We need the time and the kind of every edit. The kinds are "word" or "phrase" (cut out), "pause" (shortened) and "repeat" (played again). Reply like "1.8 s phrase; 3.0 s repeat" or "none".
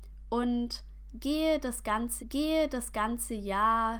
2.2 s repeat

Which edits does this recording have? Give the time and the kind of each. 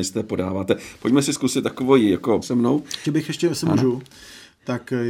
2.4 s word; 3.0 s word

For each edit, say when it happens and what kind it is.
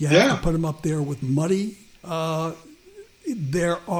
1.9 s pause

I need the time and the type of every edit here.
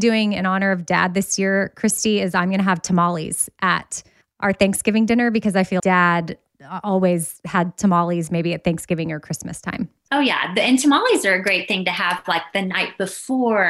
5.8 s word

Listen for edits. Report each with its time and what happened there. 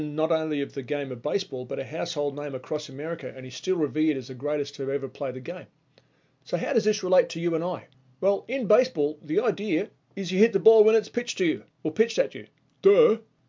none

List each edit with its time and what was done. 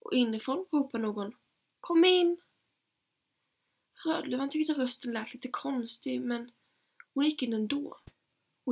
none

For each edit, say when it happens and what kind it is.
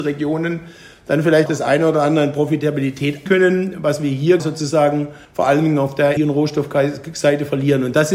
1.5 s word; 3.3 s word; 4.4 s word; 5.2 s pause; 6.2 s word

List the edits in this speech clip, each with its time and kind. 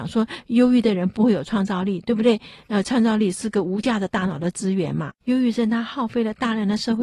5.2 s pause

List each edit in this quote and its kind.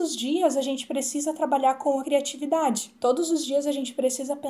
2.0 s phrase; 3.0 s pause

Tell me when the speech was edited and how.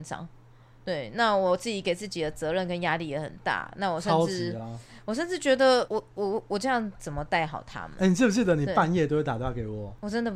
none

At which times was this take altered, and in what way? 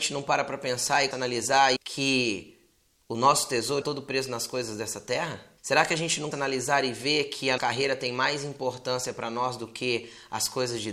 1.1 s word; 1.8 s phrase; 3.8 s word; 5.6 s pause; 6.3 s word; 7.6 s word

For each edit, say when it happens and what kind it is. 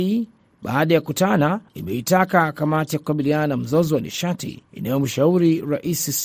1.7 s pause; 4.7 s pause

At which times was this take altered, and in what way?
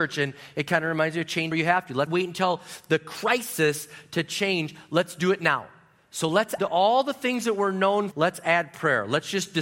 1.5 s word; 2.1 s word; 6.6 s word; 8.1 s word

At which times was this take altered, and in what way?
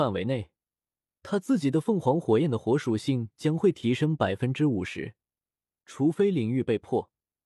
none

